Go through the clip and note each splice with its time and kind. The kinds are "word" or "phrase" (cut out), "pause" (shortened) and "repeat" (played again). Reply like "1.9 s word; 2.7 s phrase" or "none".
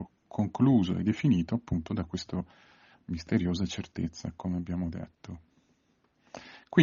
none